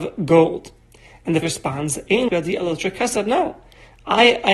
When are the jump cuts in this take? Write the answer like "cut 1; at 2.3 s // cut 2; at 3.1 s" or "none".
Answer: cut 1; at 1.4 s // cut 2; at 2.3 s